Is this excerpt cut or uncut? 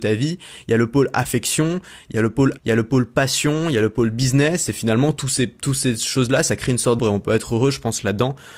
cut